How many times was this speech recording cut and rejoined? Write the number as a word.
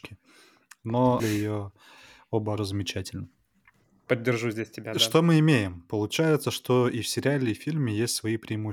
two